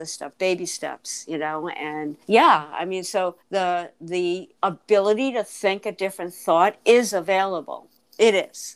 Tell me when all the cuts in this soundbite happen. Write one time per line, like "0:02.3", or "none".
0:02.2
0:03.4
0:04.5